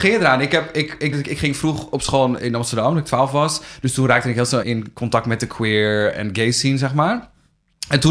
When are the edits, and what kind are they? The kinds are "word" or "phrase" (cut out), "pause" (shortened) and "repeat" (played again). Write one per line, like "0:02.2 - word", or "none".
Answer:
0:01.1 - word
0:02.4 - word
0:04.6 - word